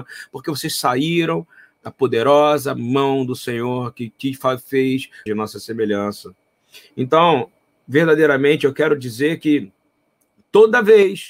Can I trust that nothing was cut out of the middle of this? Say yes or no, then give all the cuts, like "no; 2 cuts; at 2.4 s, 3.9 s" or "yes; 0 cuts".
no; 1 cut; at 5.3 s